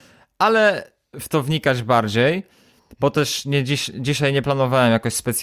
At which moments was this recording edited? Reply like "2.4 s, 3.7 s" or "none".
1.1 s